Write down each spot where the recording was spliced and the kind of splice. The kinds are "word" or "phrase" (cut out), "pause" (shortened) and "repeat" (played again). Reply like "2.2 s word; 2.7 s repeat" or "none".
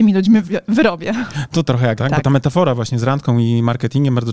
1.6 s phrase; 2.0 s word